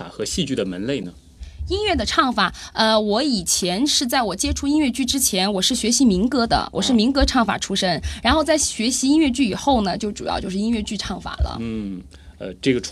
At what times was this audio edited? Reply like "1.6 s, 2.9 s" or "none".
none